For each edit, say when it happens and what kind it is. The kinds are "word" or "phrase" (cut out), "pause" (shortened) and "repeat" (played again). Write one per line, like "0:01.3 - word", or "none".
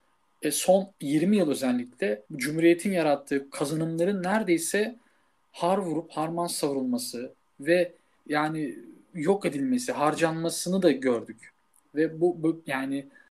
0:02.3 - pause